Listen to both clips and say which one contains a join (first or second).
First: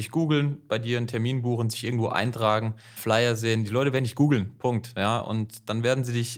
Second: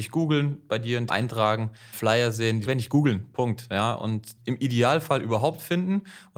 second